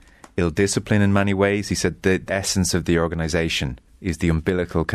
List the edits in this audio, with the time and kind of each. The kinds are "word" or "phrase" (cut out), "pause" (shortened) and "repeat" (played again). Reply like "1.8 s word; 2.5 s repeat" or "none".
2.3 s word; 3.9 s pause